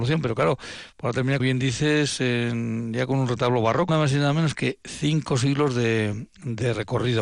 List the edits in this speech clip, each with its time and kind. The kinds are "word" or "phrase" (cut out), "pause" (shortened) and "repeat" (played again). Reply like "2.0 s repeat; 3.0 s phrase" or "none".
1.4 s word; 3.9 s phrase